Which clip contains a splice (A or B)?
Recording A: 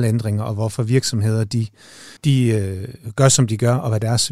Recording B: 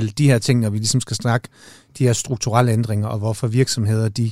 A